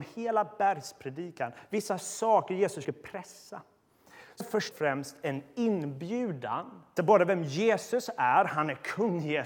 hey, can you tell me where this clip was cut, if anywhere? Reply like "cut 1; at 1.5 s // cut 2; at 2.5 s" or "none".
cut 1; at 2.8 s // cut 2; at 4.4 s // cut 3; at 4.7 s // cut 4; at 7.0 s